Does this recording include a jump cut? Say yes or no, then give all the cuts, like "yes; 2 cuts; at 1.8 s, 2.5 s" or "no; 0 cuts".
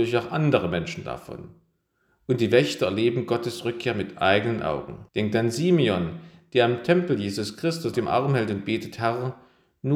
yes; 2 cuts; at 5.1 s, 7.9 s